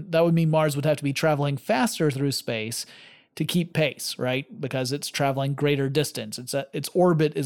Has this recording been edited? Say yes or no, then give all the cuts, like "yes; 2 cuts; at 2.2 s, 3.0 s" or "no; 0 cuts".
no; 0 cuts